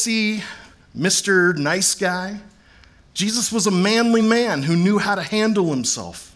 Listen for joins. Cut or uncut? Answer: uncut